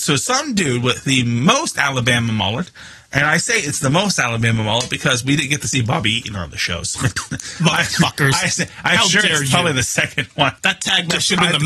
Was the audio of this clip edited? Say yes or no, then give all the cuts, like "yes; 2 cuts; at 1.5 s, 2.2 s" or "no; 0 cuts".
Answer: no; 0 cuts